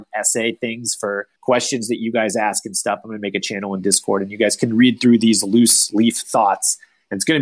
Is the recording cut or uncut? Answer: cut